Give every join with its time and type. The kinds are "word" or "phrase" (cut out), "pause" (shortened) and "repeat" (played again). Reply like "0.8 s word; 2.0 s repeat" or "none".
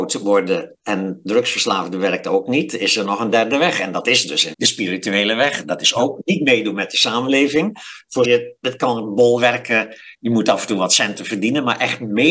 4.5 s word; 8.2 s word